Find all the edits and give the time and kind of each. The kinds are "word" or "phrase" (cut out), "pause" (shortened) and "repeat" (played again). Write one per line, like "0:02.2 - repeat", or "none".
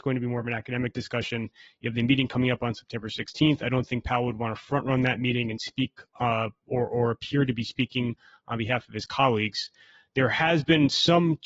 none

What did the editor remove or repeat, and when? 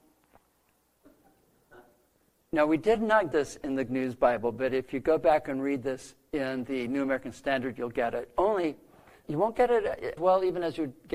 0:03.3 - word
0:03.9 - word
0:09.2 - word
0:10.2 - word

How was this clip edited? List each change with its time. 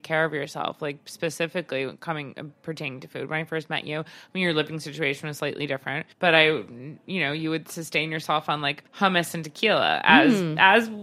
0:06.1 - pause
0:08.9 - pause

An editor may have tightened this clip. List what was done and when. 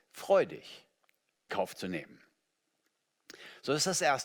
0:01.5 - word

